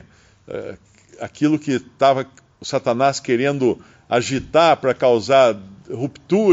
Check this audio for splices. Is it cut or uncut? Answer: uncut